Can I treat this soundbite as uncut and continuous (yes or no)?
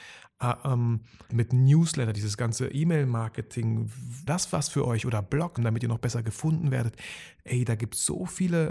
no